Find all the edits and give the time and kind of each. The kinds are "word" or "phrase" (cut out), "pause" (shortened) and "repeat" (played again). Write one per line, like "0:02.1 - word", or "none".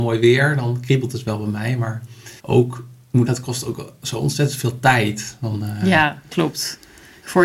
0:02.4 - pause
0:03.3 - phrase